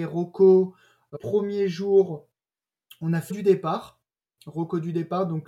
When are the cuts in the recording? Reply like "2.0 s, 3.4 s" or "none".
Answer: 1.1 s, 3.3 s

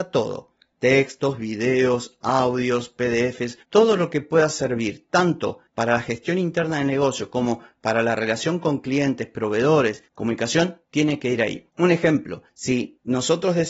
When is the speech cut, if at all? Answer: 3.6 s

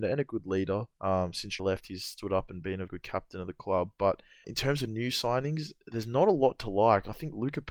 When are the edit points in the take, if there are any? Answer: 0.9 s, 1.6 s, 2.9 s, 4.4 s, 5.8 s

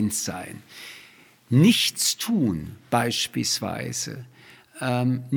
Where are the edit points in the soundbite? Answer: none

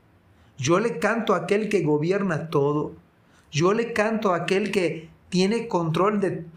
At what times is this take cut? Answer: none

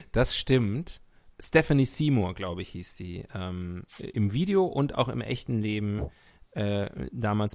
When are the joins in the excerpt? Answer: 4.1 s

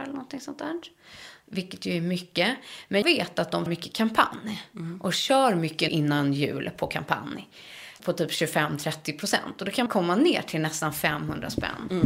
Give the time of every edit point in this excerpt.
3.0 s, 3.7 s, 5.9 s, 8.0 s, 9.9 s

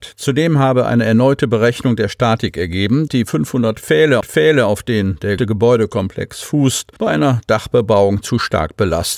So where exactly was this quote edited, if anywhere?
3.1 s, 4.2 s, 5.4 s, 7.0 s

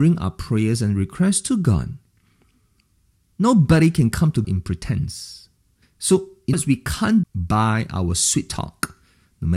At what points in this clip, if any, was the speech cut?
4.4 s, 5.8 s, 6.5 s, 7.2 s

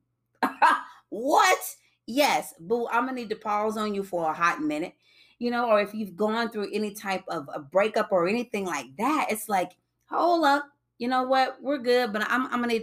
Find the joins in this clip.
none

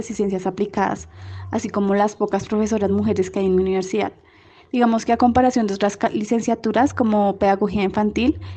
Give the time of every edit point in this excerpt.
none

